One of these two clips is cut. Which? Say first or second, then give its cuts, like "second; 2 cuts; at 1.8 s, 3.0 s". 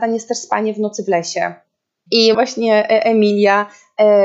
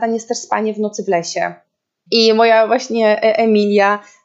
first; 1 cut; at 2.3 s